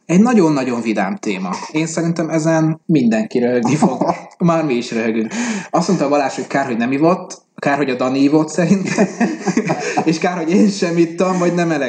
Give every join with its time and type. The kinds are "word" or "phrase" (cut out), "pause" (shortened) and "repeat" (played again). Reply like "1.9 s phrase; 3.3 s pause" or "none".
2.8 s pause; 7.5 s pause